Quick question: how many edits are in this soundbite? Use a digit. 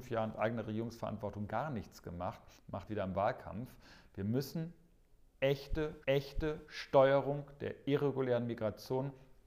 3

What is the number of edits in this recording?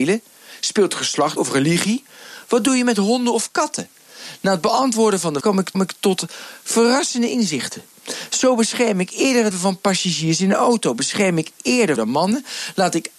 5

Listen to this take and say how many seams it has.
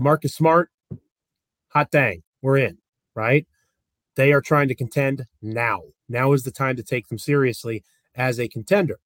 0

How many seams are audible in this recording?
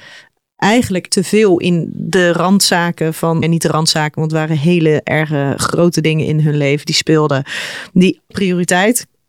3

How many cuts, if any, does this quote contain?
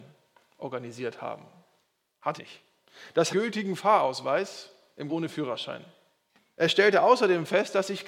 4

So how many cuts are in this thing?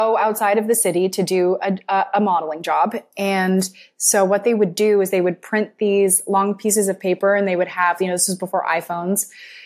0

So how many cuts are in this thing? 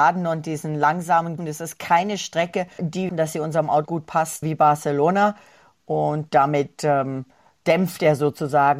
6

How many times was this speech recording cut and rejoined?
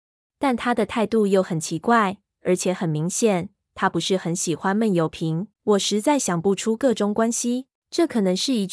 2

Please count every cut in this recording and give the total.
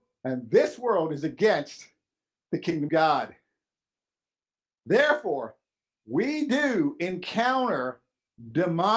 1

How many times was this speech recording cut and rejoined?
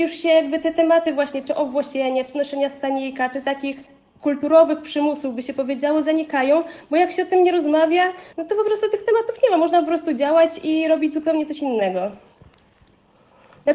1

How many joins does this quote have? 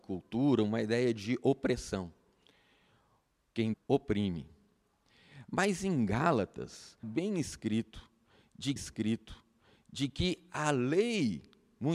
3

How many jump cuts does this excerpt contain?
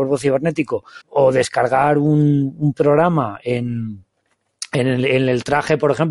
1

